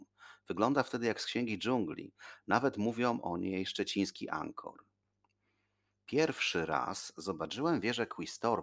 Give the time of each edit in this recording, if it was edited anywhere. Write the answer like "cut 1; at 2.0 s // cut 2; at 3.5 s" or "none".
none